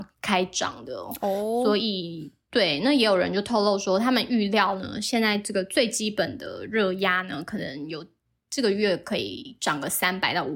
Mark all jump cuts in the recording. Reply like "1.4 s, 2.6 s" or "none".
none